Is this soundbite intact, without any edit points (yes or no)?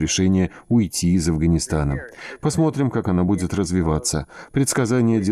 yes